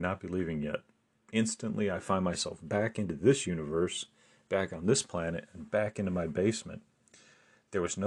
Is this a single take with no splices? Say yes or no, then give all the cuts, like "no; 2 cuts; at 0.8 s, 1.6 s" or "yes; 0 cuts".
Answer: yes; 0 cuts